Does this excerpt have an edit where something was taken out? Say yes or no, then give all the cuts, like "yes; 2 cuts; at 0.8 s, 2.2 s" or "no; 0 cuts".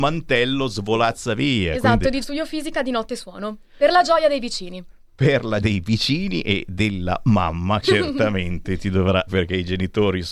yes; 4 cuts; at 2.2 s, 5.6 s, 7.8 s, 9.3 s